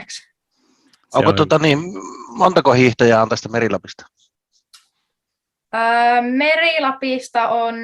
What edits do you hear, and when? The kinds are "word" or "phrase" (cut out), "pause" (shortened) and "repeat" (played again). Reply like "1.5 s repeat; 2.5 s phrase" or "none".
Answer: none